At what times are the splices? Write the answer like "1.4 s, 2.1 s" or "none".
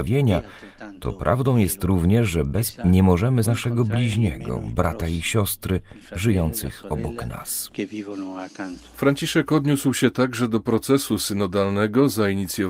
2.7 s, 3.4 s